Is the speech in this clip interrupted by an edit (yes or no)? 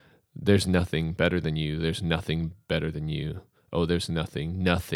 no